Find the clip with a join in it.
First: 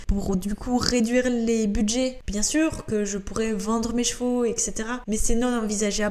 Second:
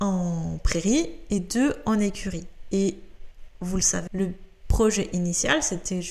second; 1 cut; at 4.1 s

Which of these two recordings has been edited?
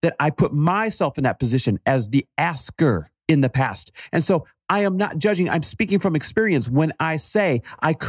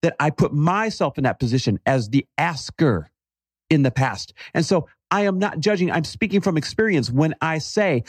first; 1 cut; at 3.2 s

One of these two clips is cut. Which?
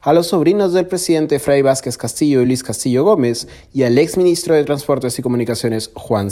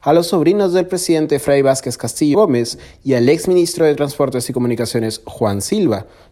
second; 1 cut; at 2.3 s

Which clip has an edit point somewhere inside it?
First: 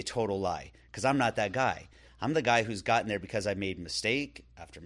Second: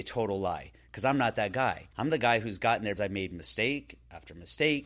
second; 2 cuts; at 1.9 s, 3.0 s

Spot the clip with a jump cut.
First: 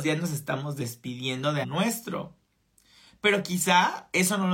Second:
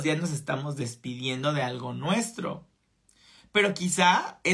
first; 1 cut; at 1.6 s

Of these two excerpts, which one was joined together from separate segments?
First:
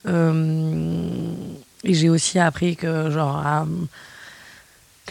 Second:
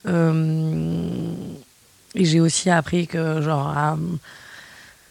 first; 1 cut; at 1.7 s

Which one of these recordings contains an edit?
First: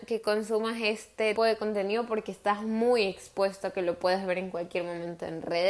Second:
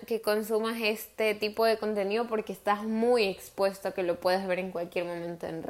first; 1 cut; at 1.4 s

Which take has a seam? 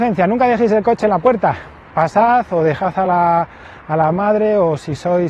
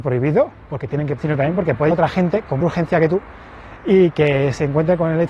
second; 3 cuts; at 1.2 s, 1.9 s, 2.6 s

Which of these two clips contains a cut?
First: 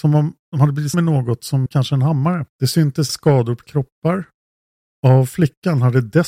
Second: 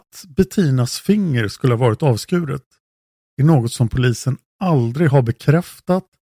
first; 5 cuts; at 0.9 s, 1.7 s, 2.5 s, 3.1 s, 3.6 s

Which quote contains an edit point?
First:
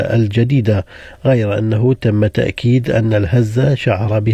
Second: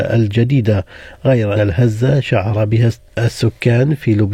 second; 1 cut; at 1.5 s

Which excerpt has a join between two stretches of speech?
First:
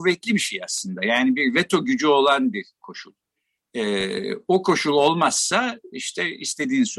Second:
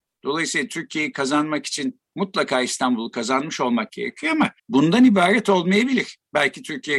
second; 1 cut; at 4.6 s

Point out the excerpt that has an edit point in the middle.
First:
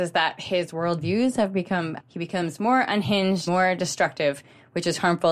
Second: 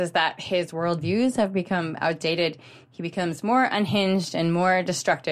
first; 2 cuts; at 2.0 s, 3.5 s

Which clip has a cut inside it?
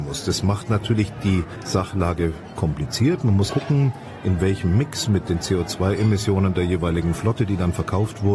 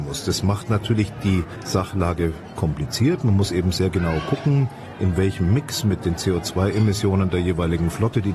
first; 1 cut; at 3.5 s

